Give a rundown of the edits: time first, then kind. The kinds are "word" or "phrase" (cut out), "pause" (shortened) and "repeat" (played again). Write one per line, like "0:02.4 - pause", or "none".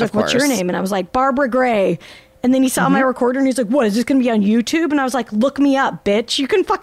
none